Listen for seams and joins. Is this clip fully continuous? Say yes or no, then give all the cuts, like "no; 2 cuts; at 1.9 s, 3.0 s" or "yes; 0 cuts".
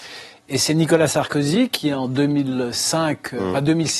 yes; 0 cuts